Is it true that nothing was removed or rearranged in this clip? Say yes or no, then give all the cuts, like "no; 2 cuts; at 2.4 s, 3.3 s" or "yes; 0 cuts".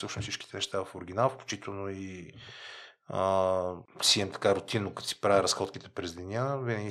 yes; 0 cuts